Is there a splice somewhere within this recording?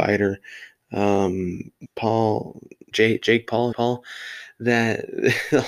yes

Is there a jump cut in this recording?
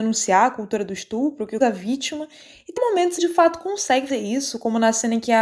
yes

